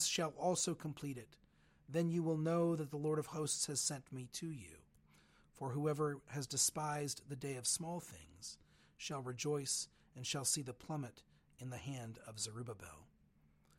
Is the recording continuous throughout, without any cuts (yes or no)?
yes